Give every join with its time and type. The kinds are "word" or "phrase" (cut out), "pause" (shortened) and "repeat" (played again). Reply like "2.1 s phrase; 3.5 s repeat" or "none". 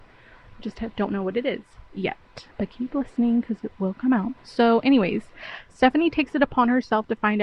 2.5 s pause; 4.4 s pause

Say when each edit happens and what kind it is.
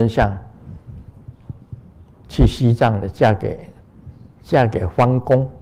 none

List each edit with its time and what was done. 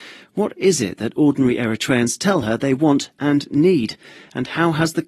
none

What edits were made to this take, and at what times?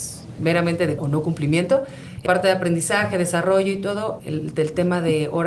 1.0 s word; 2.3 s word; 4.2 s word

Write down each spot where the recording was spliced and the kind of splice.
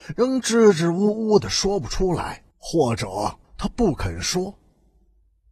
2.5 s pause; 3.4 s pause

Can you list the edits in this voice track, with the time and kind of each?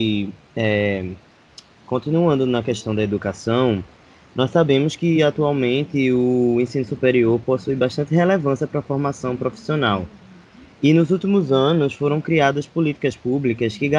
none

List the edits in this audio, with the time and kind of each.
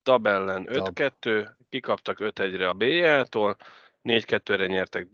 2.7 s word

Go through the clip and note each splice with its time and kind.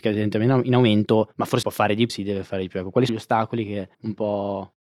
1.6 s word; 2.1 s word; 3.1 s phrase; 3.9 s pause

